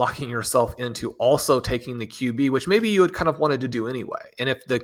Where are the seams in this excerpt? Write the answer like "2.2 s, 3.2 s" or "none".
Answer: none